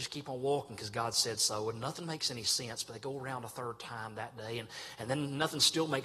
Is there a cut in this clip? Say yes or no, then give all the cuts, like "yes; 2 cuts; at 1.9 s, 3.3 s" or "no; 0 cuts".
no; 0 cuts